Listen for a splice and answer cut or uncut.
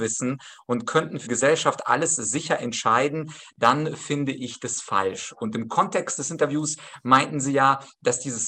cut